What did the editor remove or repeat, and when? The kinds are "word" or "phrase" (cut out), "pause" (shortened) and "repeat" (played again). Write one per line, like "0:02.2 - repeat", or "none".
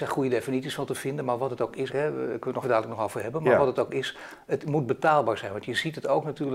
0:01.9 - word
0:02.6 - word
0:04.5 - word

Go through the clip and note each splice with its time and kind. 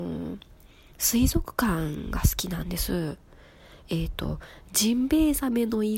none

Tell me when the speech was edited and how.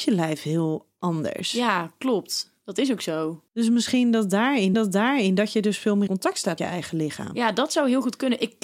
0:03.5 - pause
0:04.7 - repeat
0:06.1 - word
0:06.6 - word

